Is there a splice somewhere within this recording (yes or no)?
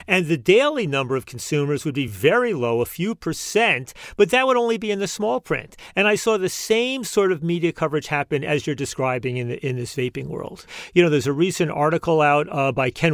no